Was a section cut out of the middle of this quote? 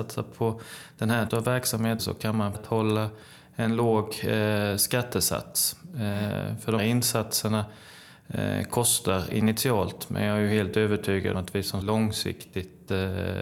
yes; 6 cuts; at 1.3 s, 2.0 s, 2.5 s, 6.8 s, 11.3 s, 11.8 s

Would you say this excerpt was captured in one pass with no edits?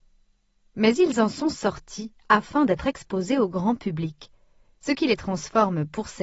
yes; 0 cuts

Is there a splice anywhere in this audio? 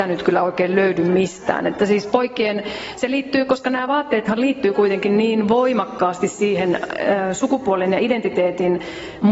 no; 0 cuts

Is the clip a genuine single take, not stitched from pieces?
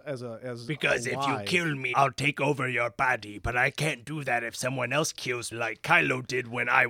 no; 2 cuts; at 1.9 s, 5.5 s

